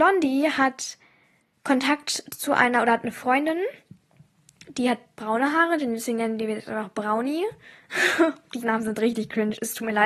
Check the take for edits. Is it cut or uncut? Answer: uncut